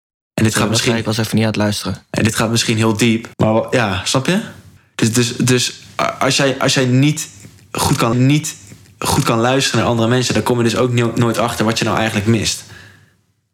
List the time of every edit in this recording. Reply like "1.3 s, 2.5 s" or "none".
3.3 s, 4.8 s, 8.1 s